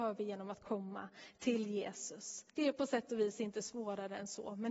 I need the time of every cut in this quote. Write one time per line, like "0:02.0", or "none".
0:02.5